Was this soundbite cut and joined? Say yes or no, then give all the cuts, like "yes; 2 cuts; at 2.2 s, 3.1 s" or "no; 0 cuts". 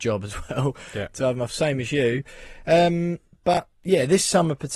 yes; 1 cut; at 1.5 s